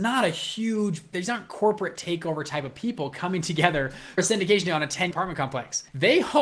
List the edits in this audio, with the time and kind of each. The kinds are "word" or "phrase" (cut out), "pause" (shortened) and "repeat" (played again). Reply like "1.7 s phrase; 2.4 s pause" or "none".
1.1 s word; 4.2 s word; 5.1 s word